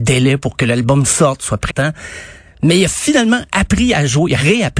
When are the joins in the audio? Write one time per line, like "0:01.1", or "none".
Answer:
0:01.7